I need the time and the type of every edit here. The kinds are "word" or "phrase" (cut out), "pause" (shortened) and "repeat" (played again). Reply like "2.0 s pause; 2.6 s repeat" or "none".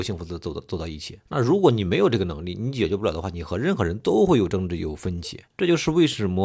1.3 s pause; 5.5 s pause

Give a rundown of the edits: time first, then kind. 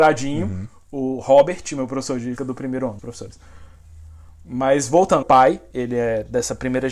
2.4 s word; 3.0 s phrase; 5.2 s word; 5.7 s word

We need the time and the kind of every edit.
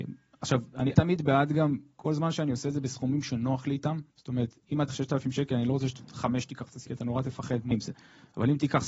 0.9 s word; 4.1 s pause; 4.9 s word; 6.9 s phrase; 7.7 s word

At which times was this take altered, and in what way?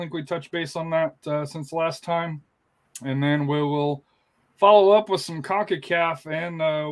none

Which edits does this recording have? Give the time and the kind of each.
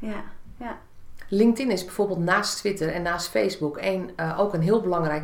none

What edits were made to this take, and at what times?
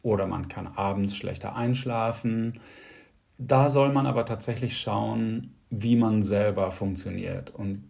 none

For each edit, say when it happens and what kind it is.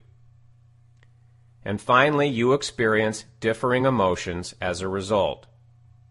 none

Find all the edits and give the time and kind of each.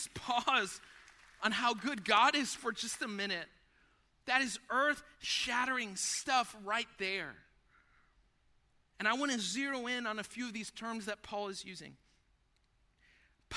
none

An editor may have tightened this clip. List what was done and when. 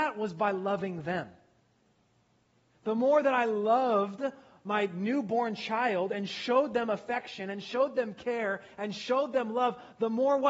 none

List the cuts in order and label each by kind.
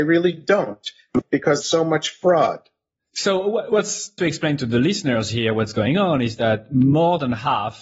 1.6 s word; 4.2 s word

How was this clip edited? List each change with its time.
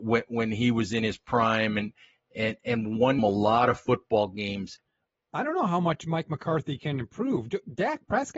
3.2 s word

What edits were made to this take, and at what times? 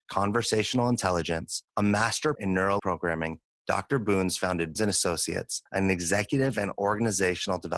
1.7 s pause; 2.4 s word; 2.8 s word; 3.6 s phrase; 4.8 s word; 5.7 s pause

